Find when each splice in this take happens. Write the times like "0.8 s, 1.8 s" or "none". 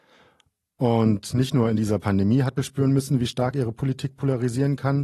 2.6 s